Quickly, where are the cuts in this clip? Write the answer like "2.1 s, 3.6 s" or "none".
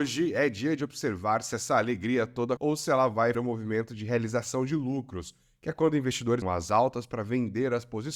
2.6 s, 3.3 s, 6.4 s